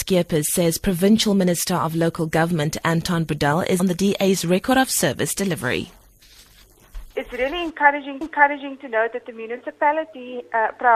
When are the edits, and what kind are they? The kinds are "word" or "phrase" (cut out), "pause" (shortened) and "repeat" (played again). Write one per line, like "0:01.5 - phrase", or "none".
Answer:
0:03.8 - phrase
0:07.1 - pause
0:08.2 - repeat